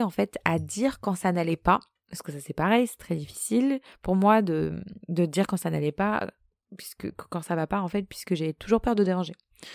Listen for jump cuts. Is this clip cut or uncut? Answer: uncut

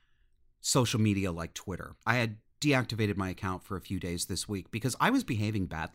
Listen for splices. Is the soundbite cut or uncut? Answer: cut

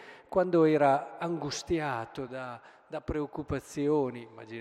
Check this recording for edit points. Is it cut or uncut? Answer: uncut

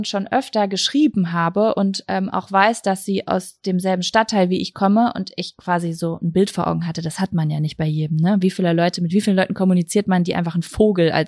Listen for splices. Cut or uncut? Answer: uncut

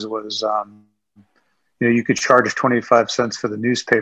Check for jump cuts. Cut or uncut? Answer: uncut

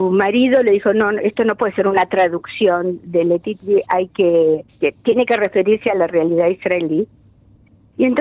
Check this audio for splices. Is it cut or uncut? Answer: cut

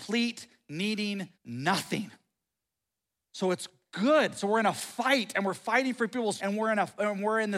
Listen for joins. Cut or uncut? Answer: cut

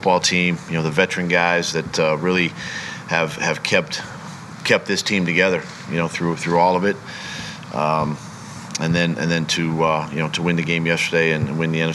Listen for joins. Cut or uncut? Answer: uncut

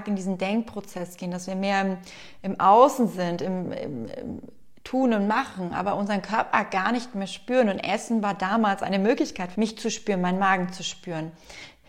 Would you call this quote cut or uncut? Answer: cut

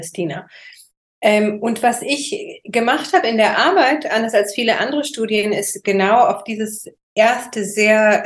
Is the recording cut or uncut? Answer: uncut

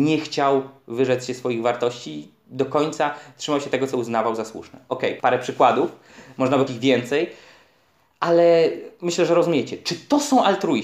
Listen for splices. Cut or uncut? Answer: cut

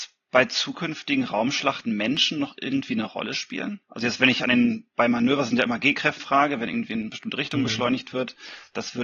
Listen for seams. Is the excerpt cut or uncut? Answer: cut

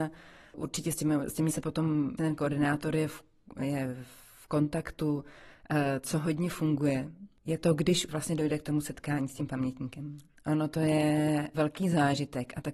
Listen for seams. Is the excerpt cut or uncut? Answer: cut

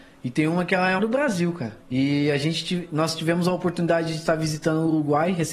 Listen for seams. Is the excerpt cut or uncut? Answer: cut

